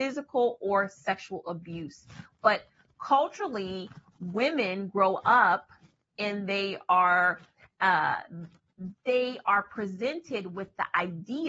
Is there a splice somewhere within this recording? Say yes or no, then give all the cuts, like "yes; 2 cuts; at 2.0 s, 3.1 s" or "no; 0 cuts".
no; 0 cuts